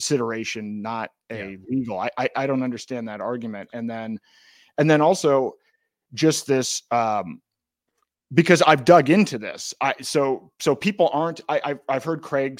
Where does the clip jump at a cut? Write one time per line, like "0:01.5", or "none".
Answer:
none